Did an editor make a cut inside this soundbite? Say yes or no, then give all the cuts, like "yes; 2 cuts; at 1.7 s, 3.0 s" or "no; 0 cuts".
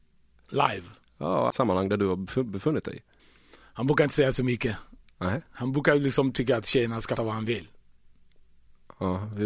yes; 4 cuts; at 1.5 s, 3.2 s, 5.1 s, 7.2 s